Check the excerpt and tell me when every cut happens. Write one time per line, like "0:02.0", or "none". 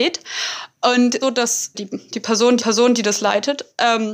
0:01.2
0:01.7
0:02.6